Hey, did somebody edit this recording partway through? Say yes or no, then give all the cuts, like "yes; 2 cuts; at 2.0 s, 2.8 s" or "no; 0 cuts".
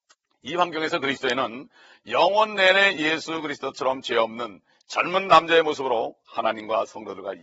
no; 0 cuts